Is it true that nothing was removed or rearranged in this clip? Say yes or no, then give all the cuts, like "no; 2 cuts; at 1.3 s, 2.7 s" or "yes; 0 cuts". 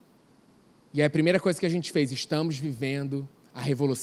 yes; 0 cuts